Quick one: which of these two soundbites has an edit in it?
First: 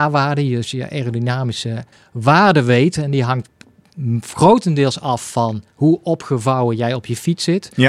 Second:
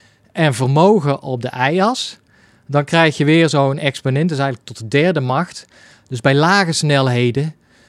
first; 1 cut; at 1.9 s

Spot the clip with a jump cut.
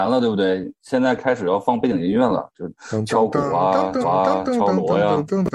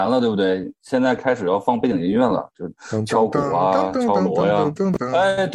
first; 1 cut; at 4.0 s

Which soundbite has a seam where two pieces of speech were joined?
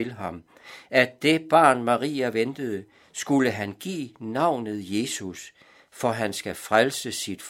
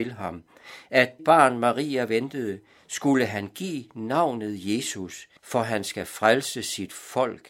second; 2 cuts; at 1.2 s, 5.4 s

